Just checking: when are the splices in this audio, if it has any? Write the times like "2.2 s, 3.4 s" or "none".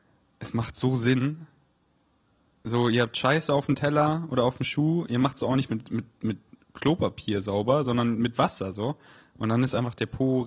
none